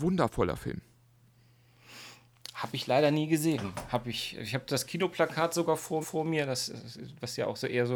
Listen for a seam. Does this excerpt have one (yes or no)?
yes